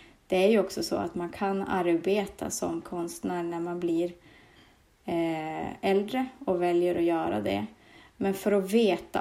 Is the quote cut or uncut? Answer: cut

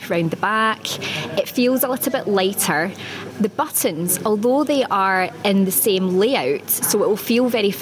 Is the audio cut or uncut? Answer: uncut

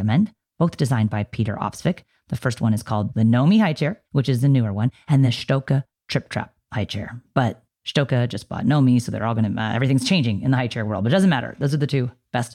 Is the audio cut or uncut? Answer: cut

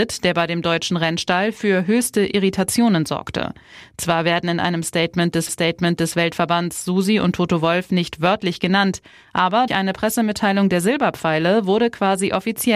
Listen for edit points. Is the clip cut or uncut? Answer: cut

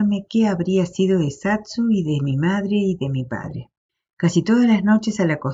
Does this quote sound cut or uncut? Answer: cut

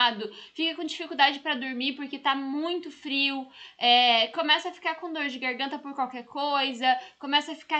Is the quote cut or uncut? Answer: uncut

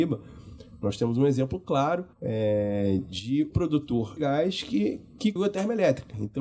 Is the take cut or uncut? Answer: cut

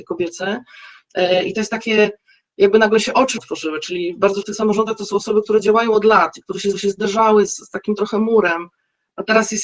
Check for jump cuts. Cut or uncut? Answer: cut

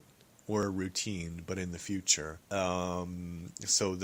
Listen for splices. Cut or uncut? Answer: cut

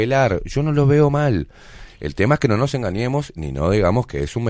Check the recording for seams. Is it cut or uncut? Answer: uncut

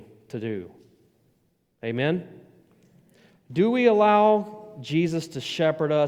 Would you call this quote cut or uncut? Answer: uncut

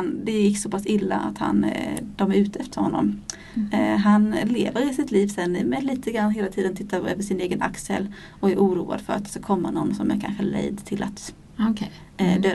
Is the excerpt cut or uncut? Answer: uncut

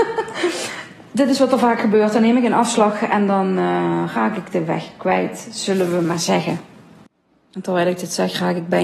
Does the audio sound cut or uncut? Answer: uncut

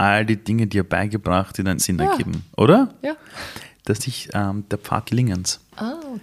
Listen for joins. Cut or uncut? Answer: cut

